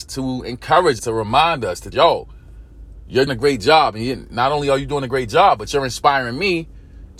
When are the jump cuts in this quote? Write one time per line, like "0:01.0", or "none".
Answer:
0:01.0
0:01.9
0:03.3

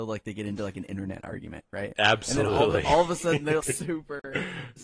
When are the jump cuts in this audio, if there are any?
0:03.6

